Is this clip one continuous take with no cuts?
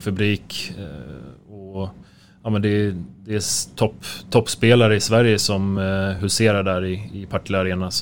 yes; 0 cuts

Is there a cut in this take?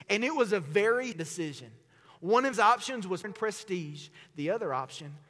yes; 3 cuts; at 1.1 s, 2.5 s, 3.2 s

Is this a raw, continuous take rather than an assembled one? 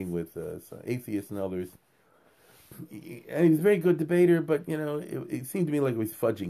yes; 0 cuts

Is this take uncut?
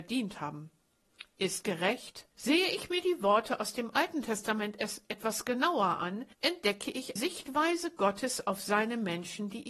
no; 4 cuts; at 1.6 s, 2.3 s, 6.3 s, 7.2 s

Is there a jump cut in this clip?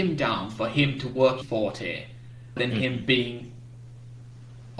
yes; 2 cuts; at 1.4 s, 2.6 s

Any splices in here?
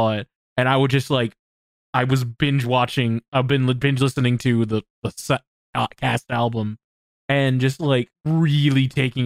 no; 0 cuts

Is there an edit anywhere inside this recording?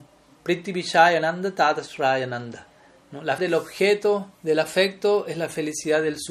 yes; 2 cuts; at 3.4 s, 4.3 s

